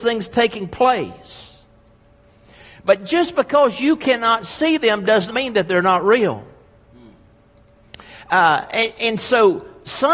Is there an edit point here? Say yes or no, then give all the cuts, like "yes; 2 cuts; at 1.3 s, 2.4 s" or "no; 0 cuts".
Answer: yes; 1 cut; at 5.3 s